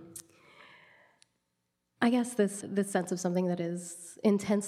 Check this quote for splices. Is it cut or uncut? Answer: cut